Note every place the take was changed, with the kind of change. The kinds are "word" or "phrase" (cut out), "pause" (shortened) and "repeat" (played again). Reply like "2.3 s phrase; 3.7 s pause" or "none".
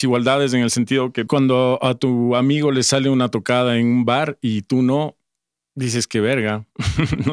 1.3 s phrase